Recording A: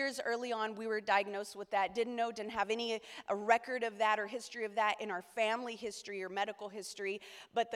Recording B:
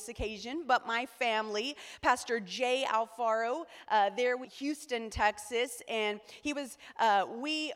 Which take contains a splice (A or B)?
B